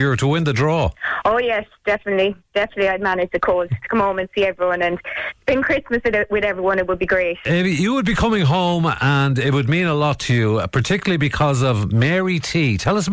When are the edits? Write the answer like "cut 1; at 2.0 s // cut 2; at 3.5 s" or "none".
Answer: none